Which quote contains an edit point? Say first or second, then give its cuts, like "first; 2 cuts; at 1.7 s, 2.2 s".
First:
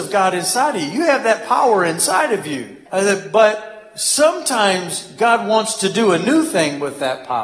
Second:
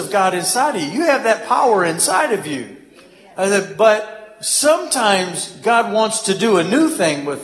first; 1 cut; at 2.9 s